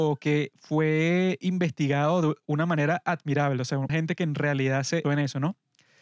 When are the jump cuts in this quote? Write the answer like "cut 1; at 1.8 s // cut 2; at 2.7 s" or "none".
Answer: cut 1; at 3.9 s // cut 2; at 5.0 s